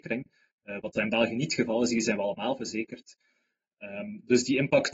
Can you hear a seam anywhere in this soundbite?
no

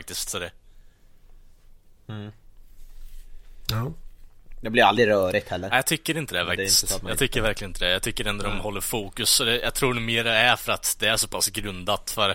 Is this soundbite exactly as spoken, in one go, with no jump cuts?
yes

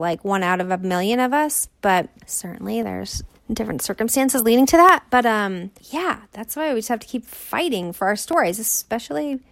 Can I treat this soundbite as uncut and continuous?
no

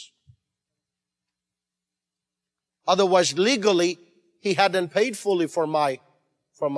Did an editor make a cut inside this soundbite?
no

